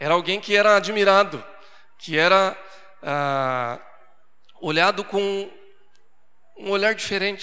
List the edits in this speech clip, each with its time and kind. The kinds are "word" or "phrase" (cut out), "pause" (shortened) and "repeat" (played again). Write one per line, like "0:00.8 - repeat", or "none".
none